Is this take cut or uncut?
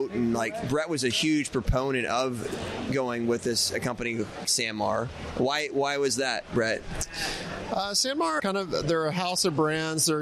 cut